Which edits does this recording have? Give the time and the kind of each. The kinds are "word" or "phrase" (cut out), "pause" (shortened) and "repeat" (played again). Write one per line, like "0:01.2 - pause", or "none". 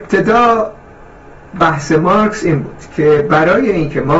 none